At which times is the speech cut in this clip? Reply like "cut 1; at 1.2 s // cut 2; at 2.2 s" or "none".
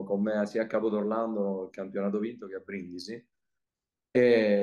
none